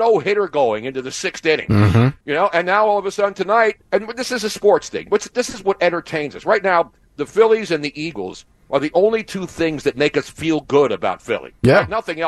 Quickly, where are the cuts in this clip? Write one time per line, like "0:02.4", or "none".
0:02.2
0:03.8